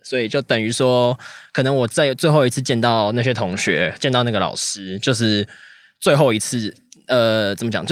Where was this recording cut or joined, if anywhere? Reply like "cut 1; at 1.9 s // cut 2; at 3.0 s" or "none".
none